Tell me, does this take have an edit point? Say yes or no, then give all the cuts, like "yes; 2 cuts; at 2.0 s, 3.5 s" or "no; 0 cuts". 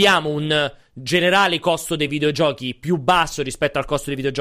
no; 0 cuts